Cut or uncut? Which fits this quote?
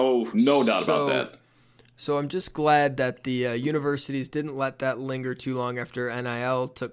uncut